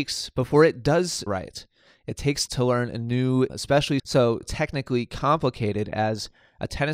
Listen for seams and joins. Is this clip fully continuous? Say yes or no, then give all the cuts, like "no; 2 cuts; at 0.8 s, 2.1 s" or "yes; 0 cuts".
no; 5 cuts; at 1.3 s, 2.5 s, 3.5 s, 4.0 s, 4.4 s